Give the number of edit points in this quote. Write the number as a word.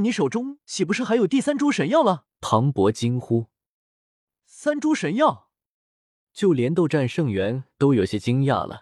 one